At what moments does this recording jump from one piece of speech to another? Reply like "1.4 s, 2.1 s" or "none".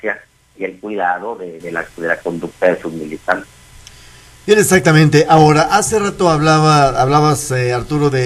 1.6 s

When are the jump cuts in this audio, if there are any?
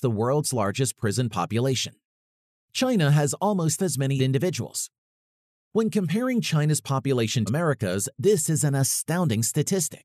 3.8 s, 4.2 s, 7.5 s

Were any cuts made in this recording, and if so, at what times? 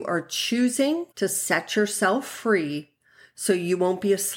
1.1 s

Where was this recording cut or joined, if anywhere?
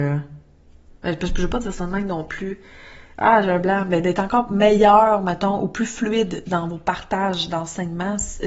1.0 s

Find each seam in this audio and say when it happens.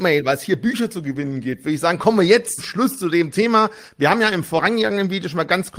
2.6 s

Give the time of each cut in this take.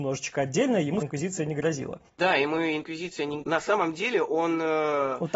1.0 s, 2.1 s, 3.4 s

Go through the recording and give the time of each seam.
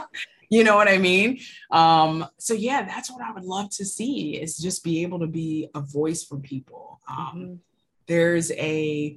none

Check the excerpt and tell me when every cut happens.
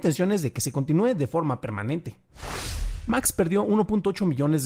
none

